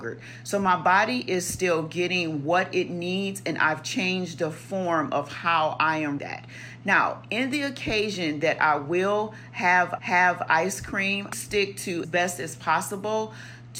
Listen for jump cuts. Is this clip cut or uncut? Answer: cut